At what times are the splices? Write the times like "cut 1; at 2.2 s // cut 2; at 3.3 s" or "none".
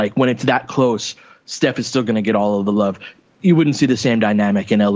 none